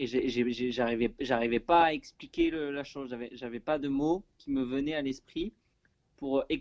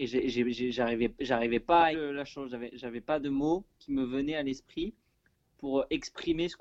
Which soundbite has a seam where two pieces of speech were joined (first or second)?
second